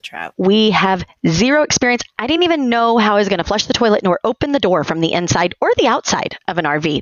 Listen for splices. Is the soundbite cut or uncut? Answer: uncut